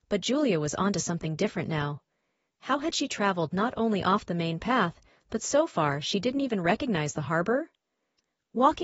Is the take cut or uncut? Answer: uncut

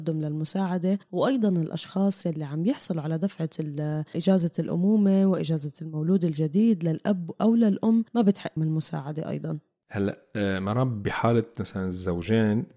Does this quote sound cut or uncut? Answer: cut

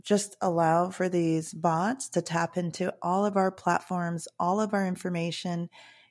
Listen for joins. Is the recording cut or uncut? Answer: uncut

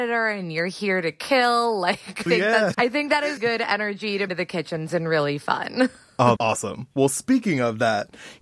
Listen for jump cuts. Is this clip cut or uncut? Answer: cut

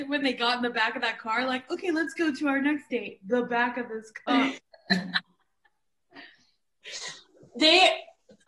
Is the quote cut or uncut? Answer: uncut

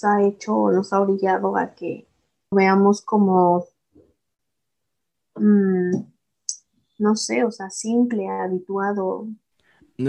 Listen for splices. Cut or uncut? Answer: cut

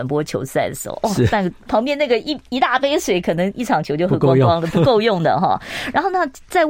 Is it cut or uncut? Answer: uncut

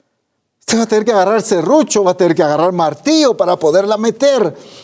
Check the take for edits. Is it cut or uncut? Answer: uncut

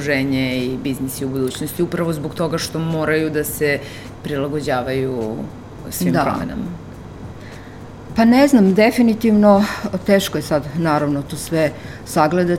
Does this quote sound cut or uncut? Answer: uncut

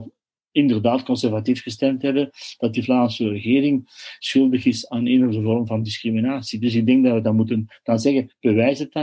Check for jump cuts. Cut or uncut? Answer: uncut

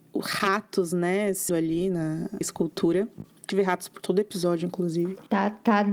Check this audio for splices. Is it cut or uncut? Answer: cut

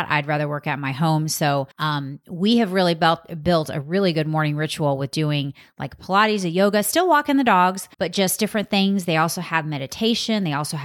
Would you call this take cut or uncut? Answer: cut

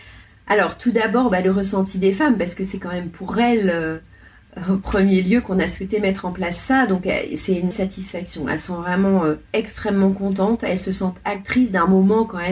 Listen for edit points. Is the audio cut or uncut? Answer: cut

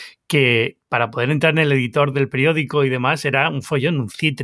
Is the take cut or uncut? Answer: uncut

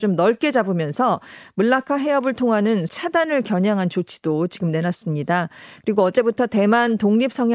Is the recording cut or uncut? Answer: cut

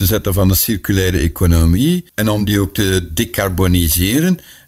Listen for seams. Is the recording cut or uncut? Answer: cut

